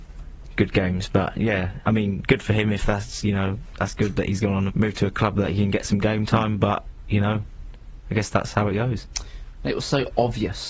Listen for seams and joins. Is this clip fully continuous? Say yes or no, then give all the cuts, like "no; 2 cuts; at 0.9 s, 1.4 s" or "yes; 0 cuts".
no; 1 cut; at 4.7 s